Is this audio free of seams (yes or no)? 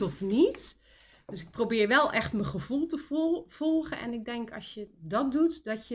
yes